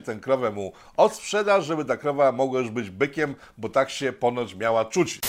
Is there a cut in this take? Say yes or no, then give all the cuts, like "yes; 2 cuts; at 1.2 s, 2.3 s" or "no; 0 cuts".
no; 0 cuts